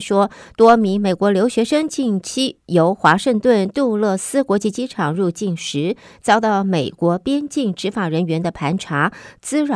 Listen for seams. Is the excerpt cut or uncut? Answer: uncut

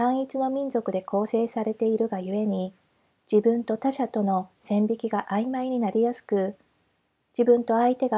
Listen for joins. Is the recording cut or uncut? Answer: uncut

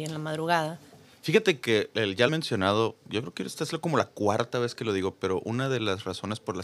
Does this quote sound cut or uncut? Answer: cut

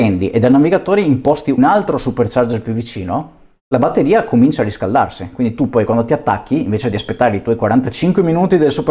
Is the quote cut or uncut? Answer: cut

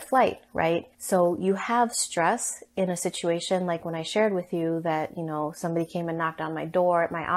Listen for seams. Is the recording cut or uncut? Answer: cut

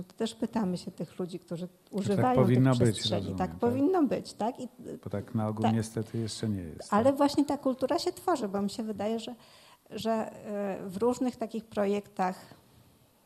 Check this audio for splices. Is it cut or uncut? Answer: uncut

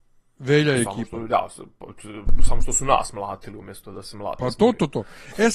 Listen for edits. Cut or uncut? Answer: uncut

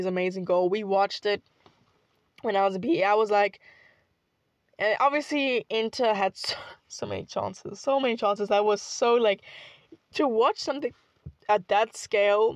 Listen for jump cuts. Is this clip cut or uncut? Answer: uncut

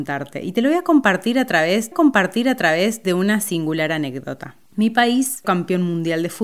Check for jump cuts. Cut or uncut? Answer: cut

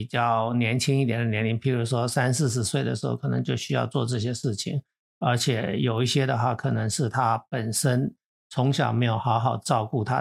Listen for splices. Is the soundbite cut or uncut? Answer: uncut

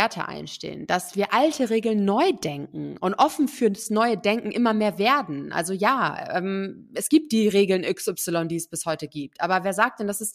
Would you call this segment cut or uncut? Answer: uncut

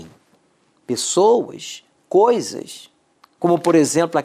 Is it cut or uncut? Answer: uncut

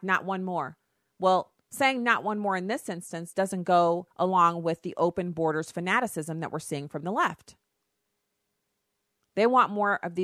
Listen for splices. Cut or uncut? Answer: cut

